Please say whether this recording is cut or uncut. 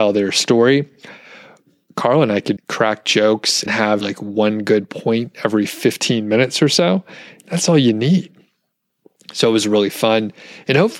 cut